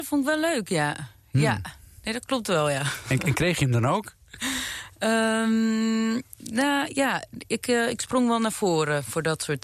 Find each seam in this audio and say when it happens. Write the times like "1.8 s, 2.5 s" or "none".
none